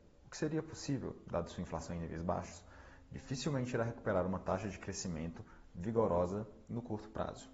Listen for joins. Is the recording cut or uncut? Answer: uncut